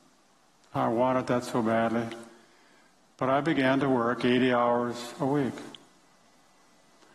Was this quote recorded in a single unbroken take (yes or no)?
yes